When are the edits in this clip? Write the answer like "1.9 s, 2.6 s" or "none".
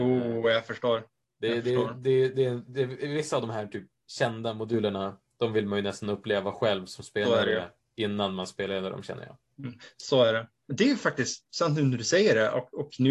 none